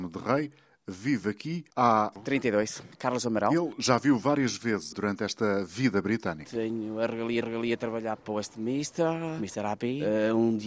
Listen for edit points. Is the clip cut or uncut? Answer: cut